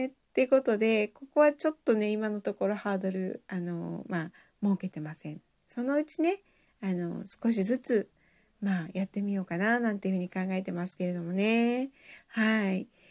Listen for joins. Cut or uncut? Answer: uncut